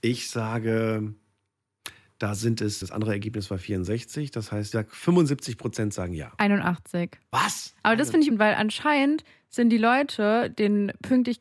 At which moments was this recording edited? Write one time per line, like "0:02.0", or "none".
0:02.8
0:04.7
0:08.3